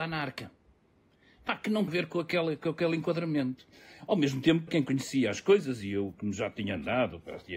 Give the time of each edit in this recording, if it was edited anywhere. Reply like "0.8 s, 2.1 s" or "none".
1.9 s, 4.7 s